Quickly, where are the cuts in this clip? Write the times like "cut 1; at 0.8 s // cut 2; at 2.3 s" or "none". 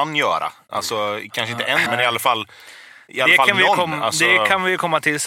cut 1; at 1.9 s